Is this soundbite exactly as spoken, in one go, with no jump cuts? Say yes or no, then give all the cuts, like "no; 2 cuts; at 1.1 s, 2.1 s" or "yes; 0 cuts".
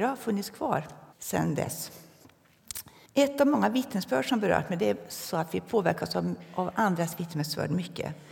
no; 2 cuts; at 1.1 s, 3.1 s